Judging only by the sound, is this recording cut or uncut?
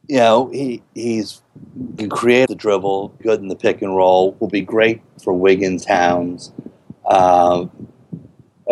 cut